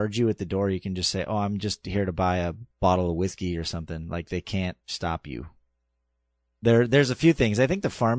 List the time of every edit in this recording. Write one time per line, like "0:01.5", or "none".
0:02.7
0:04.8